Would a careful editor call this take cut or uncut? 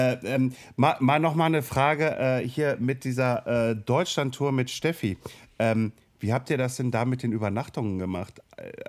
uncut